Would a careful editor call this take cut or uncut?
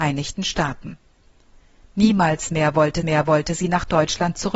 cut